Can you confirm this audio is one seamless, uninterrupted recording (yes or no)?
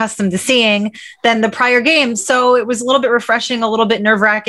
yes